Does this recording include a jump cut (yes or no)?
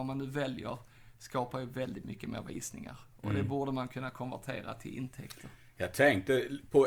no